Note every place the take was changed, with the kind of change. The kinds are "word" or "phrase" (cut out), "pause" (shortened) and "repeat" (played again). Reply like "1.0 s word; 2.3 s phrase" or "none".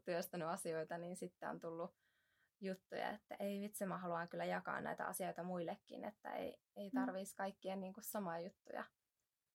none